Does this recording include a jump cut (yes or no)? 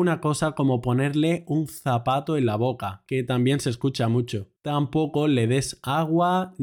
yes